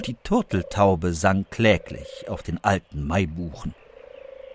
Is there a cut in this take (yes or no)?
no